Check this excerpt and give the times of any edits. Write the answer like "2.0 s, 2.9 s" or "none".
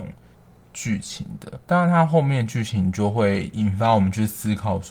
1.6 s